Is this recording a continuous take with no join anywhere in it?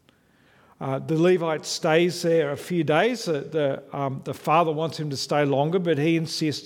yes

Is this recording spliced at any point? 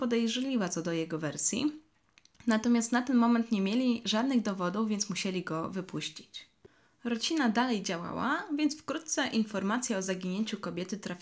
no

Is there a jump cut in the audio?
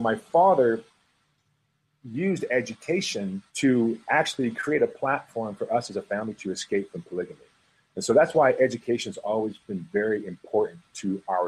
yes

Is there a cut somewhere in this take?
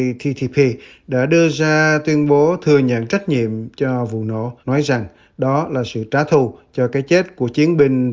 yes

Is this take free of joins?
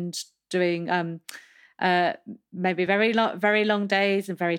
yes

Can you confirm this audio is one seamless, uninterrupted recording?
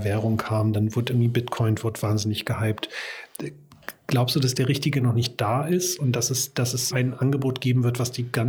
no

